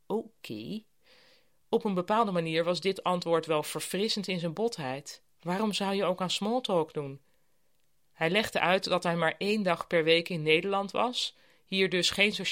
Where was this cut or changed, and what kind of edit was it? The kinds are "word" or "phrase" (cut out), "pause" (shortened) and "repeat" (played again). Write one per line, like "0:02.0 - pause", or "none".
none